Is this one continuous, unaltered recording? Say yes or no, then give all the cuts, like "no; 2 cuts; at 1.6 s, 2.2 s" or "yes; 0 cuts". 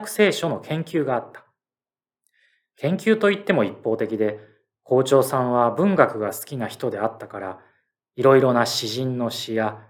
yes; 0 cuts